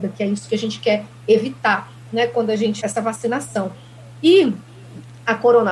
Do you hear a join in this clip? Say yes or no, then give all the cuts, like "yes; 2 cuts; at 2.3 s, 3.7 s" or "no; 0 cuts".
yes; 1 cut; at 2.8 s